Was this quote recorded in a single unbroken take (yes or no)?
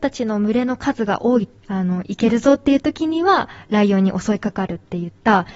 no